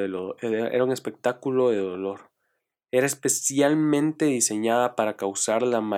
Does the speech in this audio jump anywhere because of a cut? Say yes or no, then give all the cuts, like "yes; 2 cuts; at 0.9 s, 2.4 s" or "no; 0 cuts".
no; 0 cuts